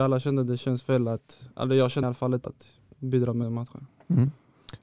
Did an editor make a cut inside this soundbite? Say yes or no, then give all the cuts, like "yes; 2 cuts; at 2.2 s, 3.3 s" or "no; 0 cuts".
yes; 4 cuts; at 1.5 s, 2.0 s, 2.4 s, 3.4 s